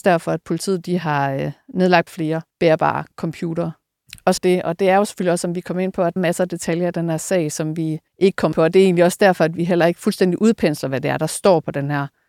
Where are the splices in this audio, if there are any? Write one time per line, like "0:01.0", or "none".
0:02.1
0:02.5
0:04.4
0:06.2
0:08.1
0:08.5